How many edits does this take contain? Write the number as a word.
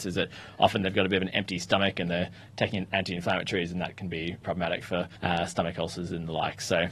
two